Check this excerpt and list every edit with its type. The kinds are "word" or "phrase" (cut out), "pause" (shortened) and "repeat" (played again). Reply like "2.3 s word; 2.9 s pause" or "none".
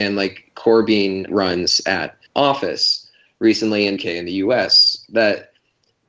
1.3 s phrase; 2.3 s pause; 4.0 s word; 5.1 s word